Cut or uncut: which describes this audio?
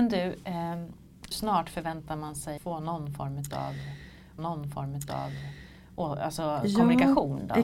cut